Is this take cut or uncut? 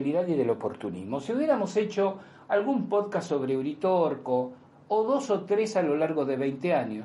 uncut